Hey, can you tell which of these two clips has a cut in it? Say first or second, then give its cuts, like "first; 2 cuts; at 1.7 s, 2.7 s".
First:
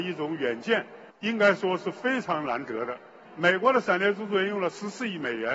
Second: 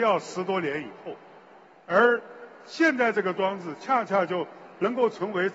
first; 1 cut; at 1.1 s